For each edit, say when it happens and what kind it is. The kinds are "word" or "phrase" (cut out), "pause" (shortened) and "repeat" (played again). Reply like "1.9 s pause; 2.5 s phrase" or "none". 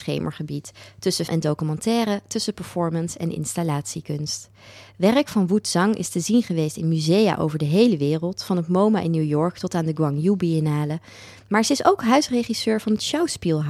1.3 s word